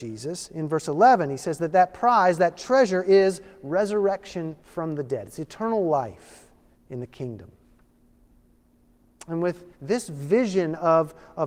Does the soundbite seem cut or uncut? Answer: cut